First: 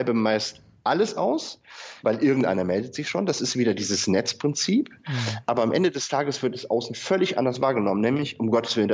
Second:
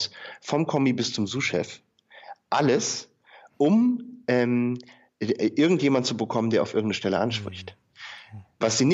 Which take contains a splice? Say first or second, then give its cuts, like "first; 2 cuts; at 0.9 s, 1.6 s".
first; 1 cut; at 2.0 s